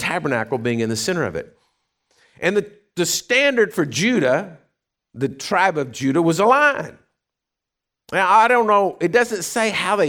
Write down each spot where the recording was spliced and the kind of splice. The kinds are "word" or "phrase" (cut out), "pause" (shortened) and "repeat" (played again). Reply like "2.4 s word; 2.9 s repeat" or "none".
none